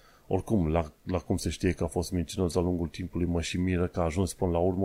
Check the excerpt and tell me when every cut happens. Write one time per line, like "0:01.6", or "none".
0:01.0